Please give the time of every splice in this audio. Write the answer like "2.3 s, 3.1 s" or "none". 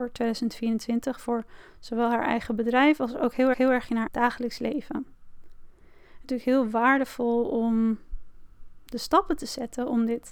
3.5 s, 4.1 s, 6.2 s